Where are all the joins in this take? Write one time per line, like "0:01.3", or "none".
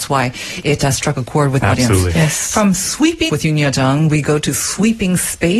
0:01.6
0:03.3